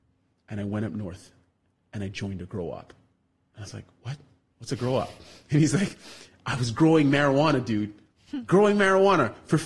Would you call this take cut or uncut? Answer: uncut